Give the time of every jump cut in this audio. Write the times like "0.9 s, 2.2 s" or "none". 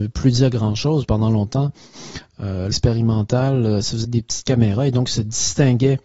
1.0 s, 2.7 s, 4.0 s